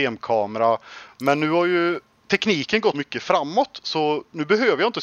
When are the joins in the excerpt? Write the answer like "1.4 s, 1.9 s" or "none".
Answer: 2.9 s